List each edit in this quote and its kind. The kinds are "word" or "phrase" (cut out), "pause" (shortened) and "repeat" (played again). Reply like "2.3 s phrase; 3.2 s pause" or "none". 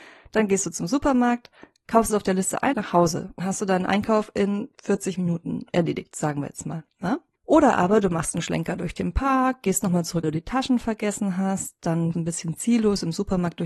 2.1 s word; 2.7 s phrase; 3.4 s word; 7.4 s pause; 10.2 s phrase; 12.1 s word